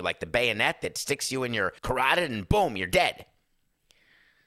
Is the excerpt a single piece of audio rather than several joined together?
no; 1 cut; at 1.8 s

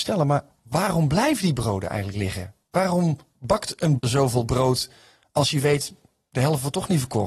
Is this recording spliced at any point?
yes; 1 cut; at 4.0 s

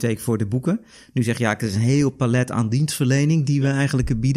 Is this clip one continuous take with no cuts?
yes; 0 cuts

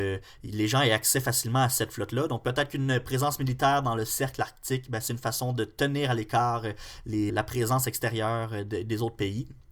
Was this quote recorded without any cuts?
no; 1 cut; at 7.3 s

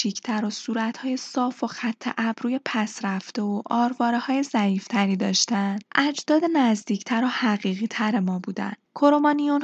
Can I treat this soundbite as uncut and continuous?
yes; 0 cuts

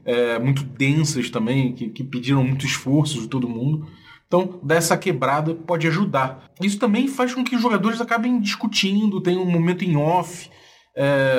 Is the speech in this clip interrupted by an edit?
no; 0 cuts

